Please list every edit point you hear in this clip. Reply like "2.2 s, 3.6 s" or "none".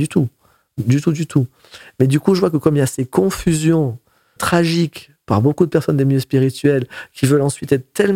4.4 s